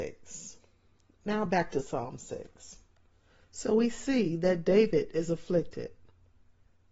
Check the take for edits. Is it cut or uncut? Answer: uncut